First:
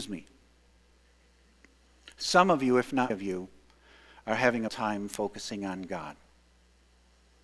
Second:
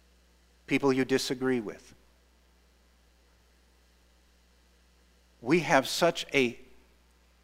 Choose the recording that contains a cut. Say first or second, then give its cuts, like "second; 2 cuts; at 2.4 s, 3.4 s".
first; 2 cuts; at 3.1 s, 4.7 s